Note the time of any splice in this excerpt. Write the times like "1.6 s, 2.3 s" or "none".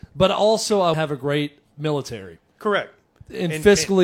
0.9 s